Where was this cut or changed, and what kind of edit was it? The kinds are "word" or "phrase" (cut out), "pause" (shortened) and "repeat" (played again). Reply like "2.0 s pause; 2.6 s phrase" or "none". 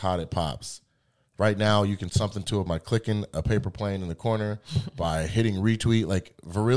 2.1 s word; 2.7 s word

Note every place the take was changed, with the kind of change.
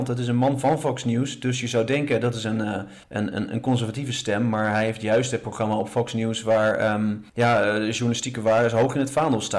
3.0 s pause; 7.3 s pause

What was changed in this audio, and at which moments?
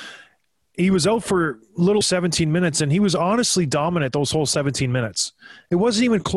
2.0 s word

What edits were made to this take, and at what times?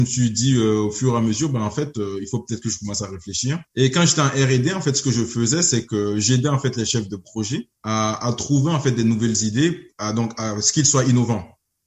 3.7 s pause; 7.8 s pause

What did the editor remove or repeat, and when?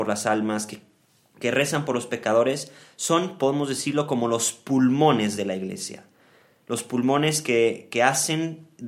none

